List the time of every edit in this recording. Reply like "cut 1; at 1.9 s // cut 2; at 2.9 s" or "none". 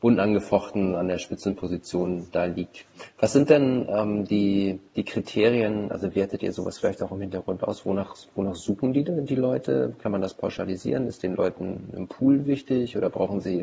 cut 1; at 4.9 s

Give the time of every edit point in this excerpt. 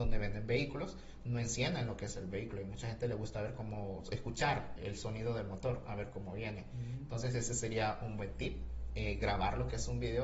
cut 1; at 4.8 s

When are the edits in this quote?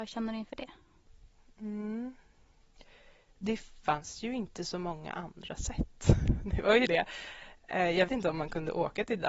cut 1; at 6.9 s // cut 2; at 8.1 s

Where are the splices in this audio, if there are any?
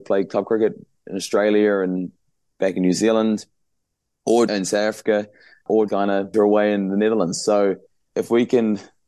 cut 1; at 4.5 s // cut 2; at 5.9 s // cut 3; at 6.3 s

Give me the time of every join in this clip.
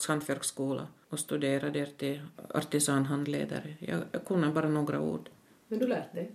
none

